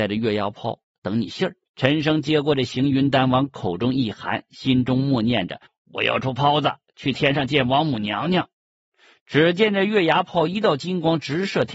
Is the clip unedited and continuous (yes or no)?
no